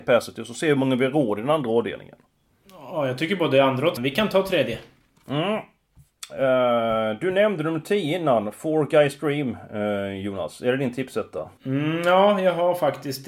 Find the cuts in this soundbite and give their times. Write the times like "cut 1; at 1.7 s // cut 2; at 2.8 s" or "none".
cut 1; at 4.0 s // cut 2; at 11.6 s